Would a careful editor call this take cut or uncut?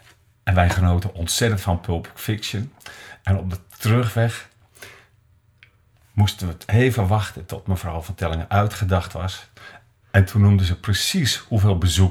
uncut